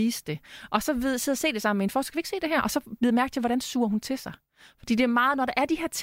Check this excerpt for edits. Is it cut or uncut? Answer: uncut